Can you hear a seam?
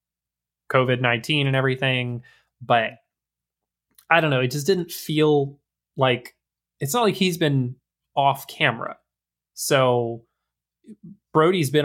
no; 0 cuts

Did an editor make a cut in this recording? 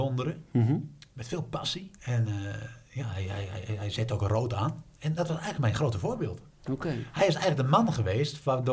yes; 1 cut; at 2.0 s

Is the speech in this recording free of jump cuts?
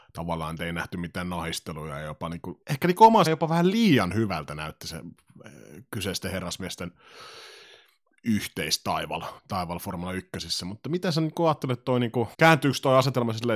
no; 4 cuts; at 2.6 s, 3.3 s, 9.4 s, 12.3 s

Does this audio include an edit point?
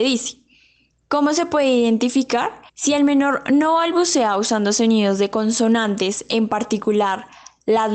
yes; 1 cut; at 2.7 s

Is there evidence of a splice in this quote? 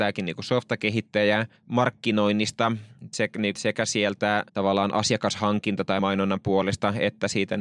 yes; 4 cuts; at 1.6 s, 3.5 s, 4.5 s, 6.0 s

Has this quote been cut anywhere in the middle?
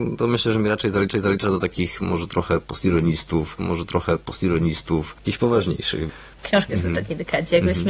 yes; 2 cuts; at 1.1 s, 3.6 s

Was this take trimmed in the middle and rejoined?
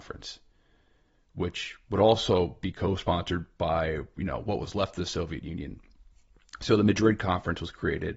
no; 0 cuts

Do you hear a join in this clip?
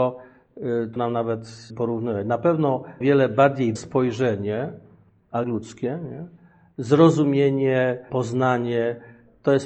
yes; 6 cuts; at 1.0 s, 1.7 s, 3.0 s, 3.8 s, 5.4 s, 8.1 s

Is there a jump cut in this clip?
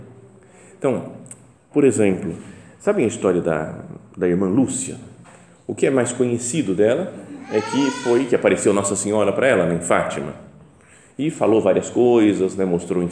no; 0 cuts

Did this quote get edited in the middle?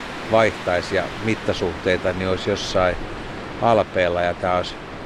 no; 0 cuts

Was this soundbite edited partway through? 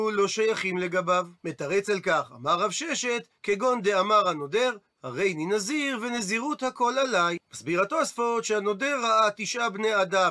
yes; 3 cuts; at 1.3 s, 3.4 s, 7.4 s

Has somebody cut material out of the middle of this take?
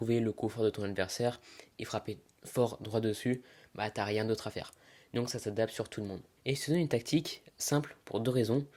no; 0 cuts

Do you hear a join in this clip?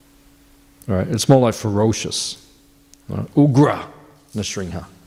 no; 0 cuts

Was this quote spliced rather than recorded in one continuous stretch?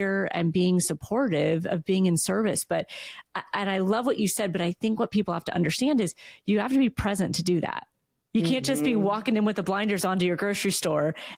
no; 0 cuts

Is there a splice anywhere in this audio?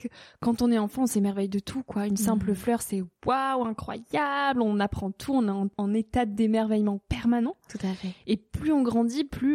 no; 0 cuts

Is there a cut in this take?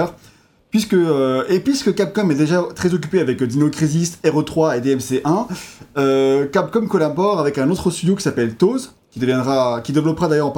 no; 0 cuts

